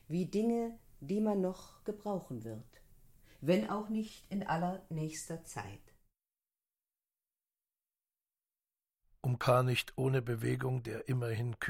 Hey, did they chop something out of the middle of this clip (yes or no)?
no